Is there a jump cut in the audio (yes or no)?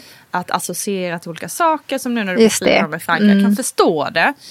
no